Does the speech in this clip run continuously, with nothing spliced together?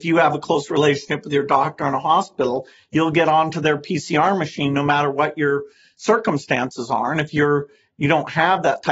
yes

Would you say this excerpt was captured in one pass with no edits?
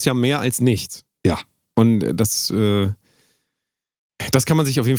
yes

